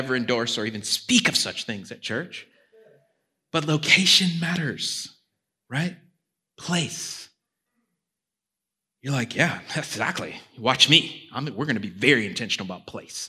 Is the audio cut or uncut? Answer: uncut